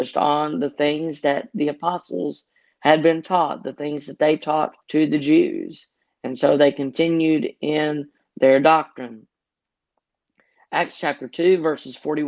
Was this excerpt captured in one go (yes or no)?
no